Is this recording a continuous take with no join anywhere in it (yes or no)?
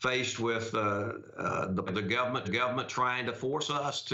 no